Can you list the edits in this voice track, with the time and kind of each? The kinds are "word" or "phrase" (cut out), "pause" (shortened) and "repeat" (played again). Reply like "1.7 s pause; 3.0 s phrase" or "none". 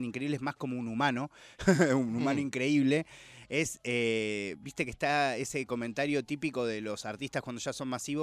none